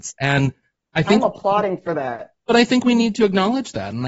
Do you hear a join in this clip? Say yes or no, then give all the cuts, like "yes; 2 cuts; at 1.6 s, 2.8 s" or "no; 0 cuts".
no; 0 cuts